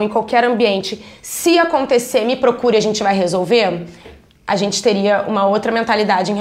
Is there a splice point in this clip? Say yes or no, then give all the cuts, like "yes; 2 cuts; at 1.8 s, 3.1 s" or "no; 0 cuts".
no; 0 cuts